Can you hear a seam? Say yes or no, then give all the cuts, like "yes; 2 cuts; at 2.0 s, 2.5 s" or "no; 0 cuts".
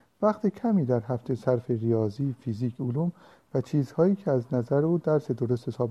no; 0 cuts